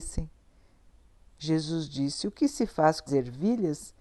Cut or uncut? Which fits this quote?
cut